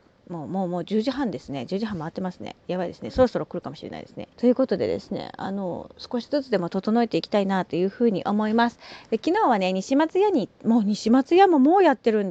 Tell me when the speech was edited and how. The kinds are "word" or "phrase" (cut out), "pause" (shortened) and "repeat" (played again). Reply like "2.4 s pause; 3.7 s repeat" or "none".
4.3 s pause